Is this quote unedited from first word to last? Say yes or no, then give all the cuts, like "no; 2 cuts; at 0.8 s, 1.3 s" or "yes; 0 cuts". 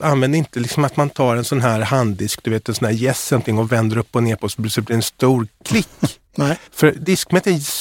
no; 1 cut; at 6.7 s